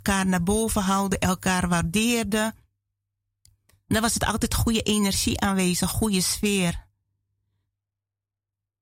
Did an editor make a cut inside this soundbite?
no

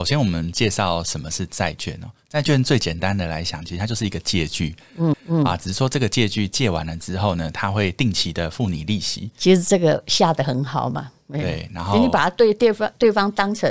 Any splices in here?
yes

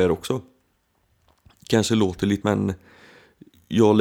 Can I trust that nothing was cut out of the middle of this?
no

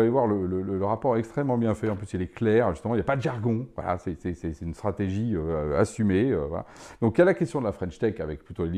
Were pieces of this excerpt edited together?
no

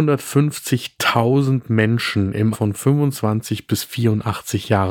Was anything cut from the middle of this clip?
yes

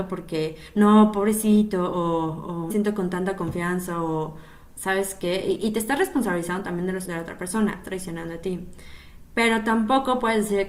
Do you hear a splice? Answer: yes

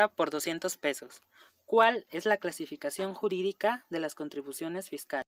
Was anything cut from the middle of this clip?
no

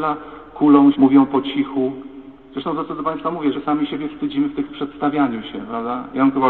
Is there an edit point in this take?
yes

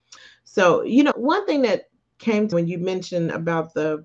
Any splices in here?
yes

